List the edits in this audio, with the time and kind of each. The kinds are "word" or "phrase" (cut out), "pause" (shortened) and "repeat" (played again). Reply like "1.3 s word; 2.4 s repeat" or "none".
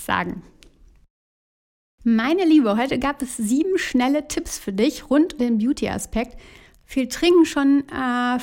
5.4 s word